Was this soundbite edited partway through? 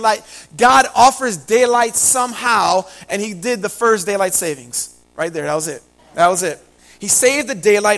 yes; 3 cuts; at 5.0 s, 6.0 s, 6.8 s

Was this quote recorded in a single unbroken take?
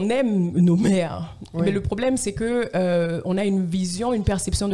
yes; 0 cuts

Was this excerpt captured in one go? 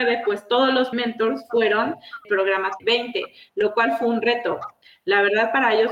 no; 3 cuts; at 0.9 s, 2.2 s, 2.8 s

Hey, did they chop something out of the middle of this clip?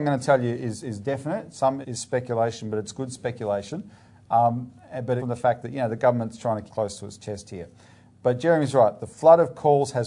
yes; 3 cuts; at 1.8 s, 5.2 s, 6.7 s

